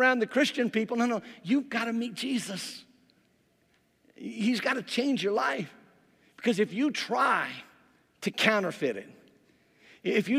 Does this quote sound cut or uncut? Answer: uncut